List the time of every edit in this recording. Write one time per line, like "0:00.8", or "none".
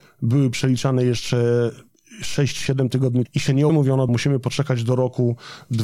0:03.3
0:03.7
0:04.1